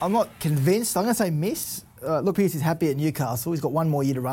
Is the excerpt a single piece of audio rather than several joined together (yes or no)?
no